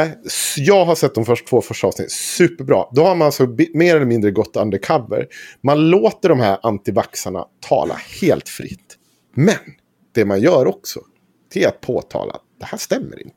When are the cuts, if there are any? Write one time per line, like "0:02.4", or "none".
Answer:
none